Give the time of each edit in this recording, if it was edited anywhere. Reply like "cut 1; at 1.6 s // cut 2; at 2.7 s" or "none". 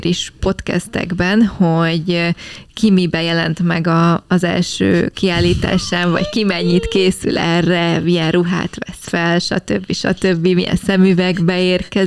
none